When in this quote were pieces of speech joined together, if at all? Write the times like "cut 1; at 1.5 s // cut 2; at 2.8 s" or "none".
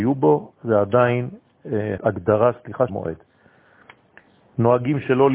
cut 1; at 2.0 s // cut 2; at 2.9 s